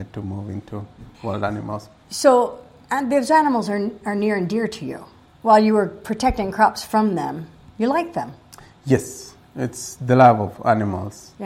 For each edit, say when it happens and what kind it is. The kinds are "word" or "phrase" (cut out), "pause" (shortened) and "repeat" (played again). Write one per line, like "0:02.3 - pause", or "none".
0:01.1 - pause